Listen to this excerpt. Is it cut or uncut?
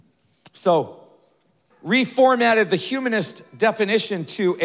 cut